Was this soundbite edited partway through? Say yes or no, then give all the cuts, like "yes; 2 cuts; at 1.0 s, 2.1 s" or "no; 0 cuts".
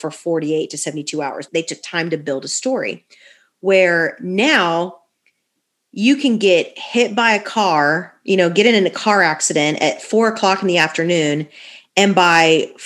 yes; 1 cut; at 1.5 s